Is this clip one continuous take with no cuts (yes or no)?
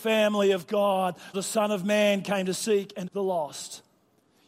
no